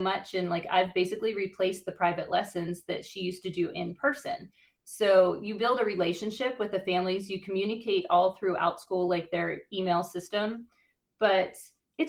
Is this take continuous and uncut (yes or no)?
yes